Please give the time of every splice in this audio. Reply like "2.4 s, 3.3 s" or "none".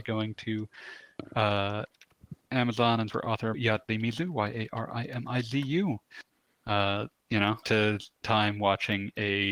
3.1 s, 3.5 s, 7.6 s, 8.2 s